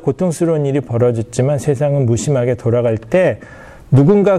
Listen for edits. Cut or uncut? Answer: uncut